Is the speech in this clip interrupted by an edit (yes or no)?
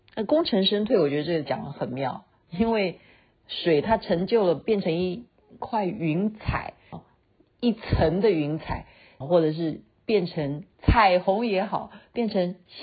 yes